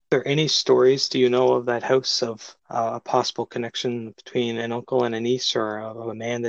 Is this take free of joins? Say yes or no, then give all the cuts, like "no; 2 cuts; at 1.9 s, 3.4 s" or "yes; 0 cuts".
no; 1 cut; at 2.6 s